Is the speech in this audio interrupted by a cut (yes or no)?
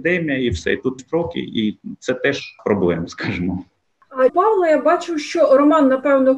yes